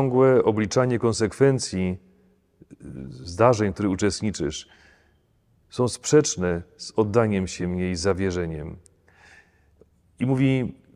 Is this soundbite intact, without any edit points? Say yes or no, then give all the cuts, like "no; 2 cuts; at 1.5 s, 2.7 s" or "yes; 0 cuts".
yes; 0 cuts